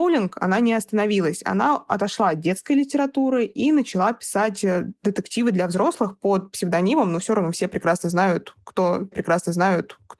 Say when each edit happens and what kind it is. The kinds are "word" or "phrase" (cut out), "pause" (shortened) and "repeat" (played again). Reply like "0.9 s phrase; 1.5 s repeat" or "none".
9.1 s repeat